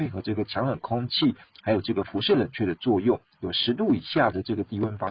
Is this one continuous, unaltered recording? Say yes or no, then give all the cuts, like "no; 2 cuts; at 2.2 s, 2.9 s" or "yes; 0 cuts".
yes; 0 cuts